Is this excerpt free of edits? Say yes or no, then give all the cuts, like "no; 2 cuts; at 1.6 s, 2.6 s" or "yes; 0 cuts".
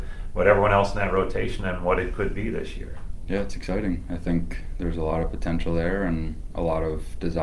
yes; 0 cuts